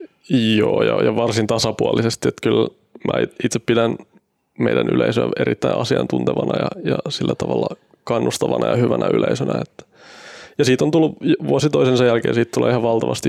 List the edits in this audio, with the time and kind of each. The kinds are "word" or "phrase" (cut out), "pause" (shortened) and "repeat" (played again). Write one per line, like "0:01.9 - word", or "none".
none